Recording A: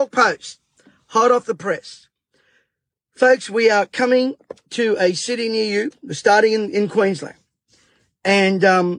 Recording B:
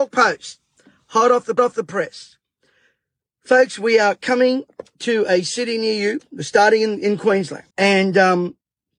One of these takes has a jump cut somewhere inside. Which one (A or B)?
B